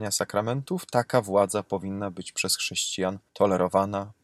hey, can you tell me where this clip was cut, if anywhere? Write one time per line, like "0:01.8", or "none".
0:03.3